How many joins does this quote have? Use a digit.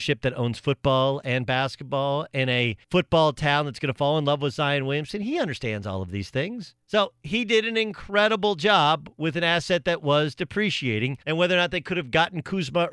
3